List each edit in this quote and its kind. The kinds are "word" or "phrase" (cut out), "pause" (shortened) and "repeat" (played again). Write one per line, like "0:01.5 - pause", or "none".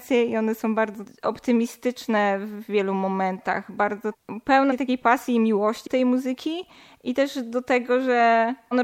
0:05.9 - word